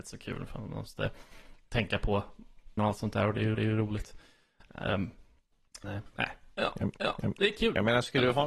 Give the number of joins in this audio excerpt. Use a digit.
4